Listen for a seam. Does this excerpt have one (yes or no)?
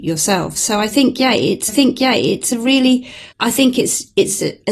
yes